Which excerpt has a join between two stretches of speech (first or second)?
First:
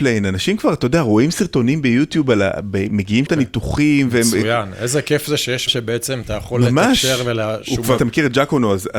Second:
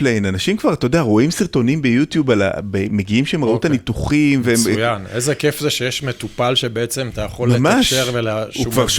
first